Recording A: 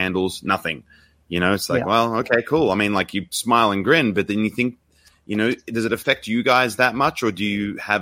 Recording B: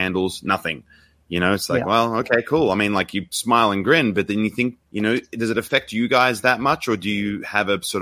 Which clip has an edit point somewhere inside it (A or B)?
B